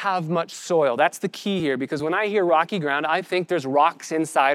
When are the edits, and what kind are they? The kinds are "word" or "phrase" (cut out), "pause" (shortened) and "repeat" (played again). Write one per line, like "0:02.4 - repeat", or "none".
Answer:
none

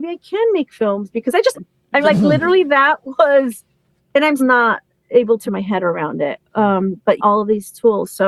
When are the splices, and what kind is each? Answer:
0:01.5 - word
0:02.0 - word
0:04.4 - word
0:05.5 - word
0:07.2 - word

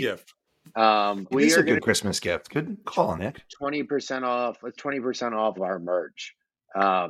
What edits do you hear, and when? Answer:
0:01.3 - word
0:02.8 - word
0:03.2 - word
0:04.8 - word
0:05.6 - word

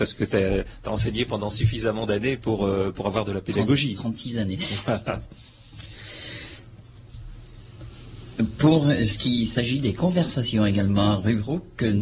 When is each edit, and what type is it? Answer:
none

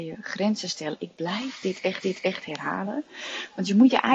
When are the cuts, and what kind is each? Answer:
0:02.0 - repeat

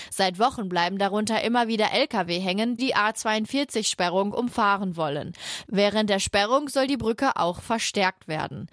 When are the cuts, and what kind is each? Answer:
0:02.8 - word

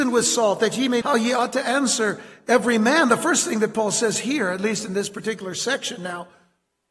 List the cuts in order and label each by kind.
0:01.0 - word

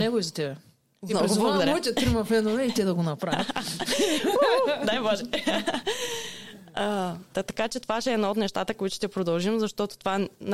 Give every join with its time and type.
0:07.3 - word

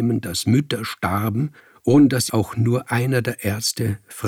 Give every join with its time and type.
0:01.6 - pause
0:02.3 - word

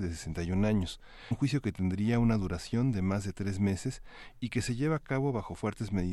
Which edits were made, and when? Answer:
0:01.3 - word

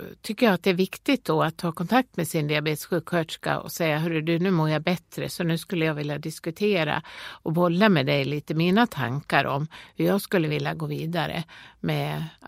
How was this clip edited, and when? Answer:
none

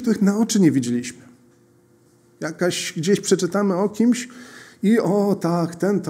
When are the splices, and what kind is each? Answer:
none

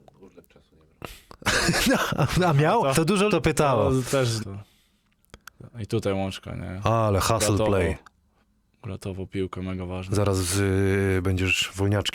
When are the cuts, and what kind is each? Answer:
0:02.9 - word
0:03.3 - phrase
0:04.4 - phrase
0:08.4 - pause

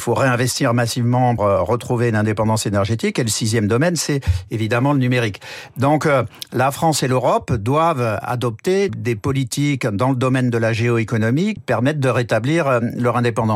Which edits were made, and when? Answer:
0:01.4 - word
0:08.9 - word
0:11.6 - word

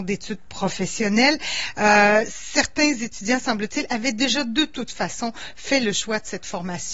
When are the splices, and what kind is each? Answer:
none

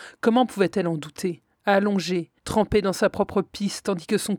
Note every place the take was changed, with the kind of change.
0:02.4 - pause

